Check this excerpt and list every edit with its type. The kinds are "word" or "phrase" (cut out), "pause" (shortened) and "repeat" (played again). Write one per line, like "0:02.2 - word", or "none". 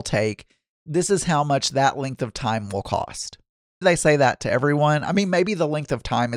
0:03.8 - word